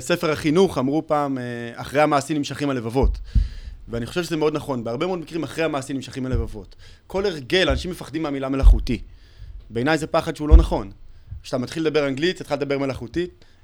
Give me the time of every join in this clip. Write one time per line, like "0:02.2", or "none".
none